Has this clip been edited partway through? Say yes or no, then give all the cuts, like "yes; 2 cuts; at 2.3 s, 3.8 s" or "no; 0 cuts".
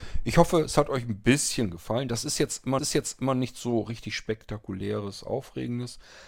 yes; 1 cut; at 2.8 s